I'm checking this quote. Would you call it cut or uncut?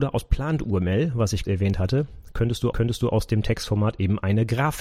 cut